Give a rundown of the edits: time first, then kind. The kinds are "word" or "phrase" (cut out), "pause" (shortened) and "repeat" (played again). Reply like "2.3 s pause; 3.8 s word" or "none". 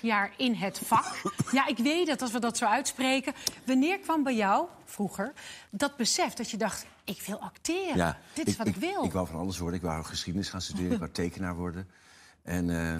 none